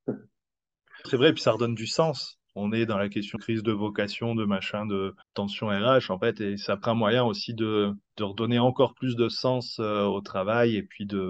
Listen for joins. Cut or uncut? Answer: cut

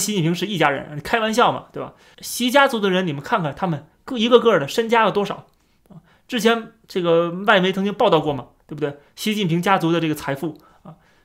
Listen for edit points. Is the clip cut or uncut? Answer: uncut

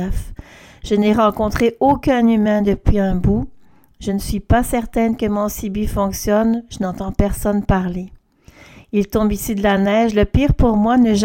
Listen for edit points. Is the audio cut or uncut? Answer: uncut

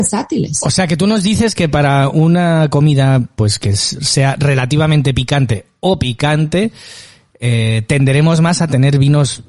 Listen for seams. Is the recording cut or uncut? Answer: uncut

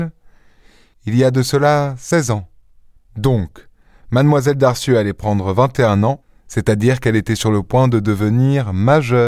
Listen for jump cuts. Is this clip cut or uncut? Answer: uncut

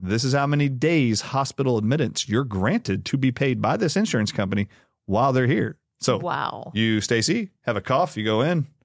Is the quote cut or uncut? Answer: uncut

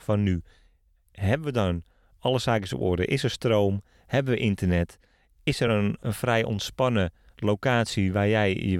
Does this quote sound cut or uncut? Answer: uncut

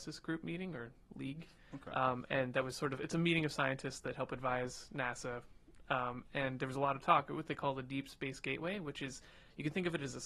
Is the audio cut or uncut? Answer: uncut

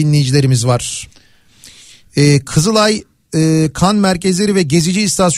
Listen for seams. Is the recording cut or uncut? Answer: uncut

